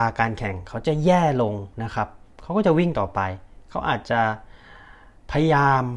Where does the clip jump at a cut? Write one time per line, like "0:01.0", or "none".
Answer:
0:01.7